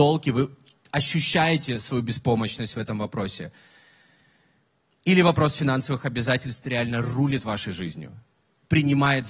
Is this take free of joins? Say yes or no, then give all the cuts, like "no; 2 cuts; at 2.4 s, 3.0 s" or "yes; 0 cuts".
yes; 0 cuts